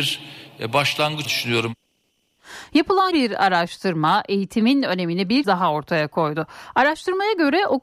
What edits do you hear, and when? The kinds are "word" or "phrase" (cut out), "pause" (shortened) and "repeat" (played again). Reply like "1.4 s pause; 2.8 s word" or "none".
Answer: 1.2 s word; 3.1 s word; 5.4 s word

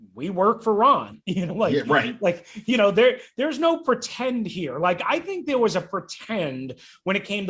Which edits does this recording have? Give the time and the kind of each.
1.5 s word

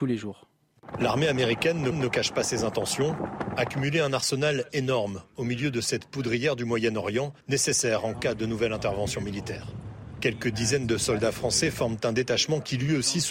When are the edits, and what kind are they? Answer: 1.9 s repeat; 7.4 s pause

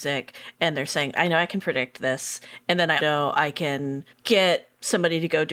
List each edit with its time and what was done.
1.2 s word; 3.0 s word; 4.1 s pause

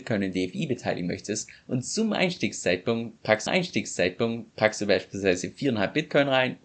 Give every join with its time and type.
3.5 s repeat

